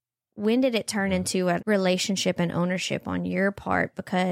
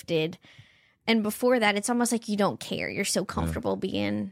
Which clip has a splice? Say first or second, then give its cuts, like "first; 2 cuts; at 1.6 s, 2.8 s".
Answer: first; 1 cut; at 1.6 s